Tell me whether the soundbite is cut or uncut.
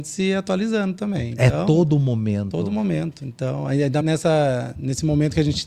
cut